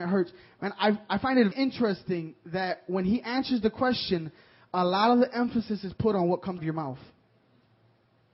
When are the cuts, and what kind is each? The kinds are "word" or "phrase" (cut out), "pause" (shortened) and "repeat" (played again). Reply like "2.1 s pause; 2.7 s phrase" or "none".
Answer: 1.5 s word; 6.6 s word

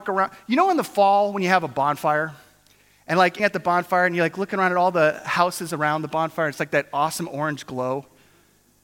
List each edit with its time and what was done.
3.4 s phrase

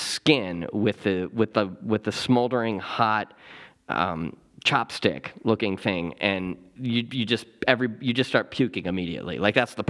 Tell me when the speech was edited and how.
none

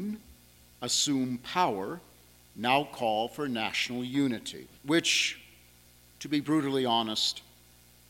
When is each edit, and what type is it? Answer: 4.8 s pause

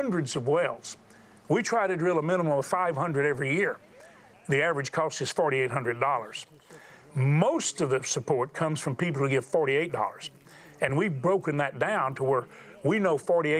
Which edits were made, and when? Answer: none

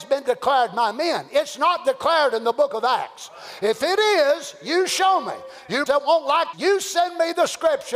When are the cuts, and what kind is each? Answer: 5.9 s word; 6.5 s word

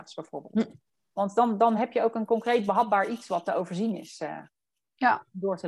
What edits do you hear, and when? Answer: none

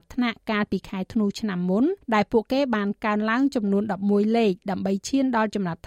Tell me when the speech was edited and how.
2.0 s pause

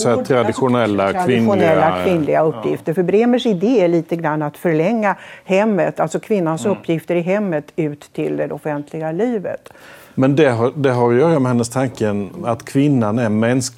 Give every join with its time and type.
none

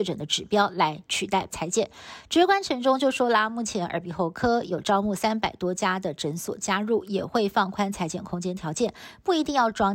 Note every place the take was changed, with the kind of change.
1.5 s word

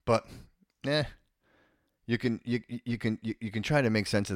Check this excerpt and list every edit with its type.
none

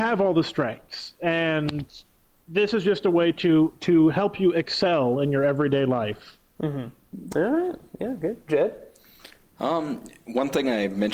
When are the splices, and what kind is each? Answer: none

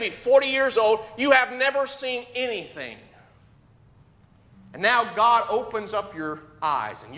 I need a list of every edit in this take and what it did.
none

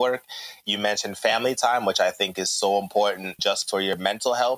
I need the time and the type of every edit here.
3.4 s word

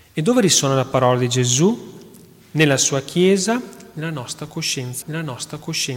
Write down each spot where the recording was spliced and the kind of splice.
5.0 s repeat

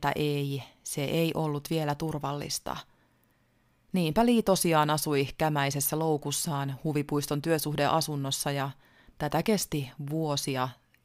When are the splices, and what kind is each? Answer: none

